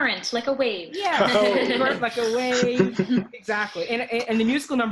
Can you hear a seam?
no; 0 cuts

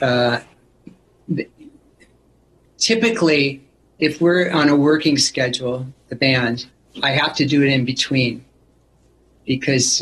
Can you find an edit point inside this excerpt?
no; 0 cuts

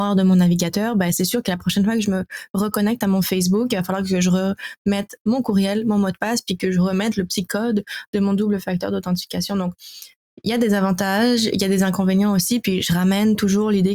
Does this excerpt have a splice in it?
no; 0 cuts

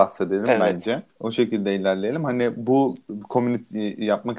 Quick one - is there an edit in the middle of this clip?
yes; 1 cut; at 1.1 s

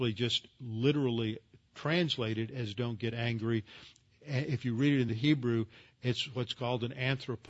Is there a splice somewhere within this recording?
no; 0 cuts

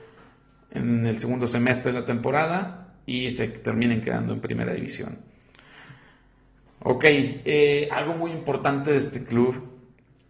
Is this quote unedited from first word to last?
yes; 0 cuts

